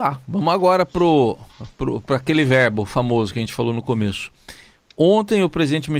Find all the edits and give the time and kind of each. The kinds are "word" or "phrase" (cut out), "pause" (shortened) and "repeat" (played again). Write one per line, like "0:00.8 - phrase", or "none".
none